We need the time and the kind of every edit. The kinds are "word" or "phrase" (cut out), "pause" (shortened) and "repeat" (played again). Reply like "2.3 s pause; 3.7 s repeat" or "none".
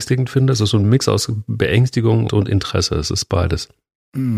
2.3 s word